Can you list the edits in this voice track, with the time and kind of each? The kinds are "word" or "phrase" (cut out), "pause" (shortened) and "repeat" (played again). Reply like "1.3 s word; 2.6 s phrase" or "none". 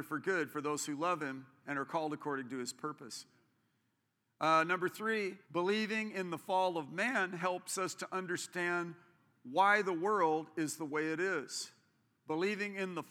5.4 s pause